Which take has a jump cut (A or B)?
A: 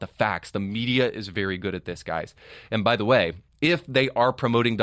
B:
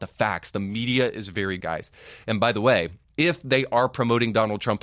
B